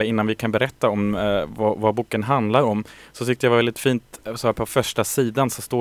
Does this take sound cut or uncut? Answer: uncut